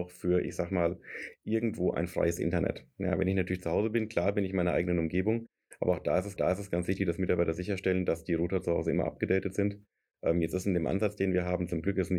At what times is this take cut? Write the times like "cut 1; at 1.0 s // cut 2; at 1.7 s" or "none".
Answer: cut 1; at 6.4 s